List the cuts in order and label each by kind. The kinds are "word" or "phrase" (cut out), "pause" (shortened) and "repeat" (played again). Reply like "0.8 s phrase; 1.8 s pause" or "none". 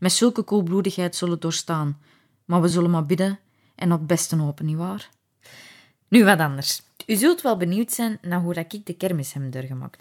none